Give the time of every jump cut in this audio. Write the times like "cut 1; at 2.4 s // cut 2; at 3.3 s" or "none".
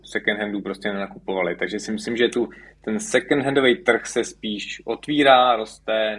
none